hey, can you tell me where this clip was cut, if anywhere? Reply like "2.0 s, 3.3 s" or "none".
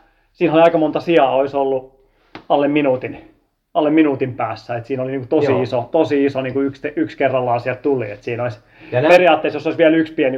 none